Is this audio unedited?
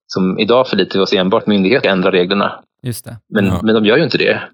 no; 2 cuts; at 1.4 s, 1.8 s

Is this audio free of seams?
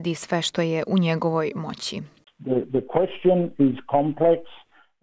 yes; 0 cuts

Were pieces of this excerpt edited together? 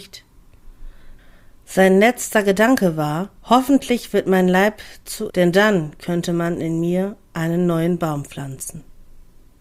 yes; 2 cuts; at 3.4 s, 5.3 s

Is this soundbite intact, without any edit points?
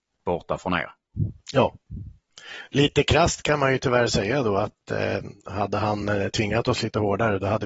yes; 0 cuts

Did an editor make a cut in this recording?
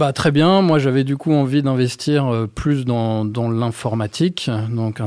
no; 0 cuts

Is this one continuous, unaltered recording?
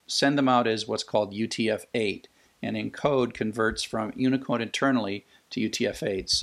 yes; 0 cuts

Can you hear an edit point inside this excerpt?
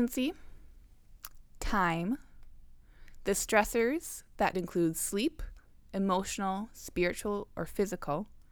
yes; 1 cut; at 4.5 s

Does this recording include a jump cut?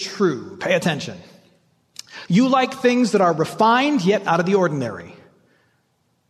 no; 0 cuts

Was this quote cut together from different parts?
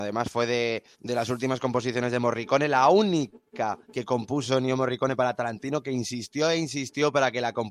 yes; 2 cuts; at 0.9 s, 3.8 s

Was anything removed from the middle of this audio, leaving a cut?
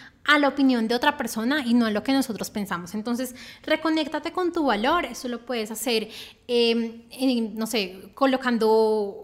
no; 0 cuts

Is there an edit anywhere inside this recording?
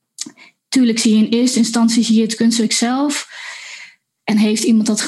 no; 0 cuts

